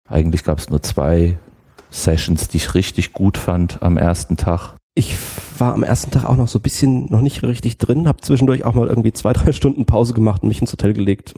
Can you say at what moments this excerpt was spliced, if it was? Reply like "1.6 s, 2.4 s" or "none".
7.4 s